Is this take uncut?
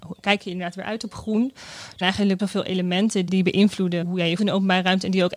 no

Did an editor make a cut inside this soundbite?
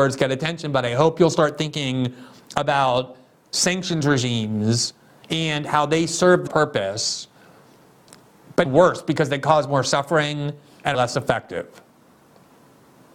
yes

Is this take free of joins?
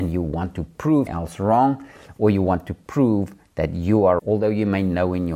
no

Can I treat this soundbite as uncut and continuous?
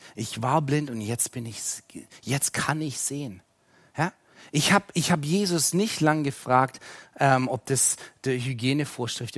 yes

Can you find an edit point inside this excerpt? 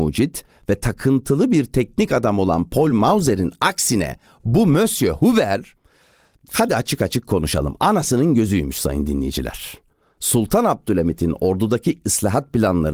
no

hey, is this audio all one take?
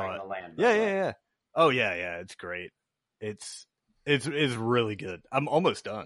yes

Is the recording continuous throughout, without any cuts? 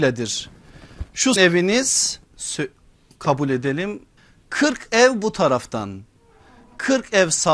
no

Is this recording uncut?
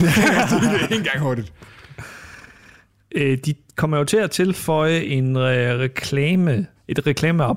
yes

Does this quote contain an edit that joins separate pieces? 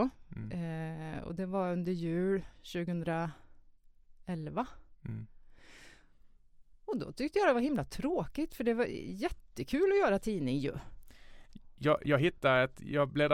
no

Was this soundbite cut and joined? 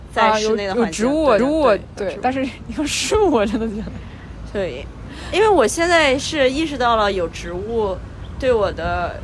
yes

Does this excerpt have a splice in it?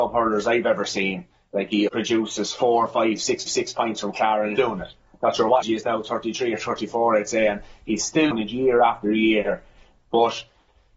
yes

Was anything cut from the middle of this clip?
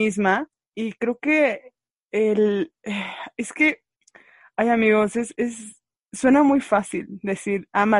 no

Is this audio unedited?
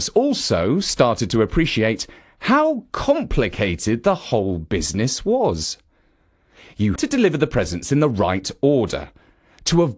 no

